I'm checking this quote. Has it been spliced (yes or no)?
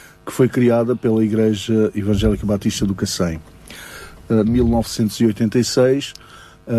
yes